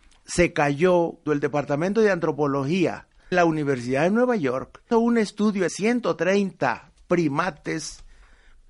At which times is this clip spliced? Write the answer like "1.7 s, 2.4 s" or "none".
1.3 s, 3.3 s, 4.9 s, 5.7 s